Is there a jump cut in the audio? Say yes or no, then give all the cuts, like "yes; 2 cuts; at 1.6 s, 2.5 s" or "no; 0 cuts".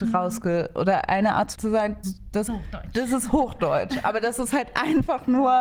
yes; 3 cuts; at 1.5 s, 2.0 s, 2.5 s